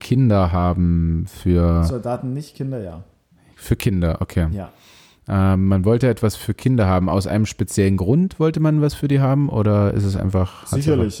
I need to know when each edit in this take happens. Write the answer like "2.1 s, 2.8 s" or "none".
none